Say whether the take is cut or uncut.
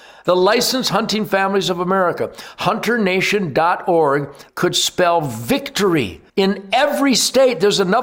cut